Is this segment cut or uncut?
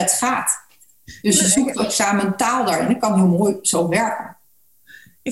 uncut